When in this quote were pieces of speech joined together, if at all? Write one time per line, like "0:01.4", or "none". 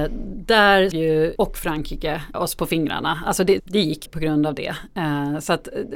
0:00.9
0:01.3
0:02.3
0:03.6
0:04.1